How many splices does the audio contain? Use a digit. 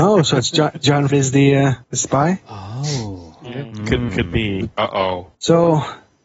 4